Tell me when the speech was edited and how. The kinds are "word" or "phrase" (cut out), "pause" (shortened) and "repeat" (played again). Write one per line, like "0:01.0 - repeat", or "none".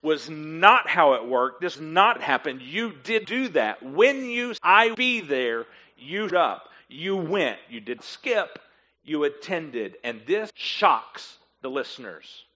0:01.7 - word
0:02.2 - word
0:03.2 - word
0:04.6 - word
0:04.9 - word
0:06.3 - word
0:08.0 - word
0:10.5 - word